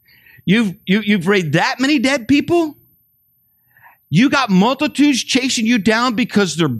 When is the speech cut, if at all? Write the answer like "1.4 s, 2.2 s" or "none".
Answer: none